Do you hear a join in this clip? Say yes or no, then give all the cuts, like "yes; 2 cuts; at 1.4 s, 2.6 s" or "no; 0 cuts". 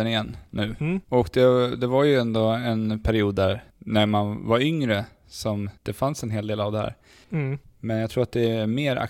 yes; 3 cuts; at 1.0 s, 3.7 s, 5.8 s